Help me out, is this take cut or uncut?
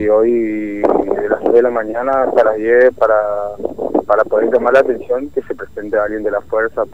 uncut